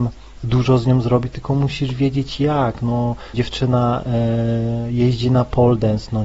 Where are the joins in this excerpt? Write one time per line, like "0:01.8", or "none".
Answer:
0:03.3